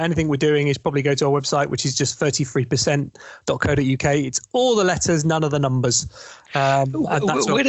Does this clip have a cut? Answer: no; 0 cuts

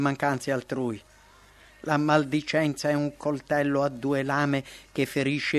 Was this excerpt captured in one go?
yes; 0 cuts

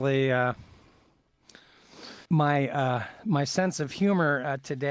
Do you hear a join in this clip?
yes; 1 cut; at 2.3 s

